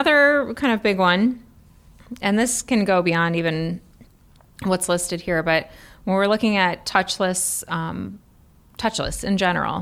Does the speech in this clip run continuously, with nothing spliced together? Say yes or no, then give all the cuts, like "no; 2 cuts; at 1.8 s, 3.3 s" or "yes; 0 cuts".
yes; 0 cuts